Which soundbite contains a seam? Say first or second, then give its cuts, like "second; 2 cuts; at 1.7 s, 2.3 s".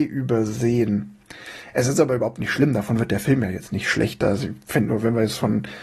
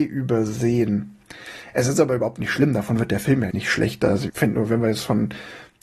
second; 2 cuts; at 3.5 s, 4.3 s